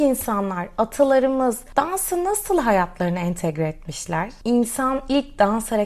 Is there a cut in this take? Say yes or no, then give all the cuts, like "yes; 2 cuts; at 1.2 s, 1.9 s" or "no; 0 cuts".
no; 0 cuts